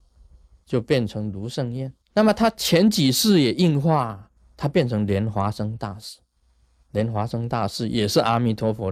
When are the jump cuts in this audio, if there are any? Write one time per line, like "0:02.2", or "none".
0:02.0
0:04.4